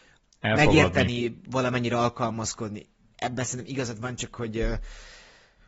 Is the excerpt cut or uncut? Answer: uncut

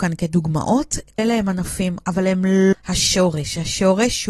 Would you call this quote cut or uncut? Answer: cut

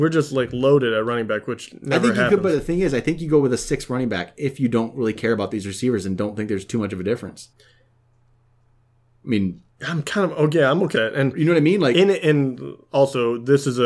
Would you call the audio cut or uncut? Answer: cut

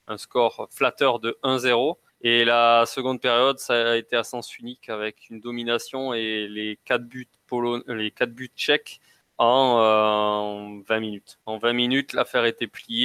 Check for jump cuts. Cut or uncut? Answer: cut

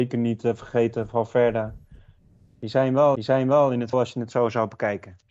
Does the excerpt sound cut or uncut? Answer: cut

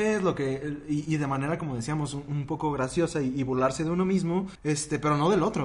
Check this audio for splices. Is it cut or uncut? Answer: cut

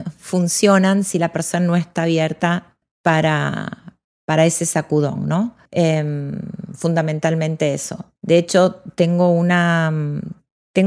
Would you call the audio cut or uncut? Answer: cut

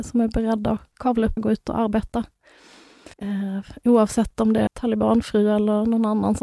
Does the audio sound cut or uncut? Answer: cut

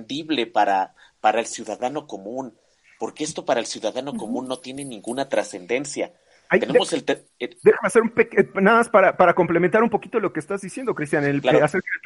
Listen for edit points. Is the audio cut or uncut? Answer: uncut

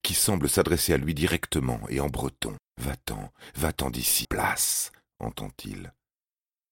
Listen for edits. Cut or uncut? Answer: cut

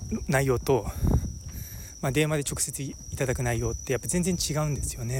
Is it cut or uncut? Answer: uncut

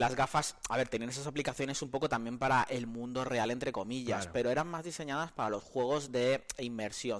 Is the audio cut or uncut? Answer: uncut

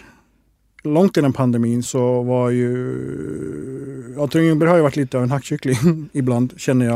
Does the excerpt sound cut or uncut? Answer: cut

